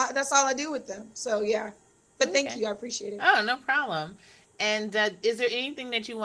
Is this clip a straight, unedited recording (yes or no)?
yes